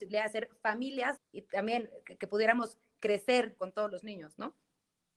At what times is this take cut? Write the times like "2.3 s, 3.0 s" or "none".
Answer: 1.2 s, 3.6 s